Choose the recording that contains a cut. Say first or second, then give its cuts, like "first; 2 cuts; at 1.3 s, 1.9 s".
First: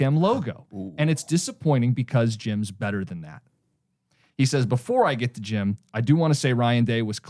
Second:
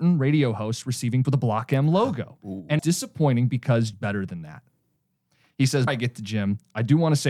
second; 4 cuts; at 1.2 s, 2.8 s, 3.9 s, 5.9 s